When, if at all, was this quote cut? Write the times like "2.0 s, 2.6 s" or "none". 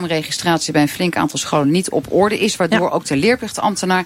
none